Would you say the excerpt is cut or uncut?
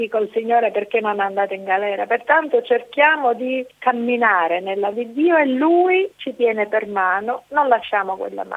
cut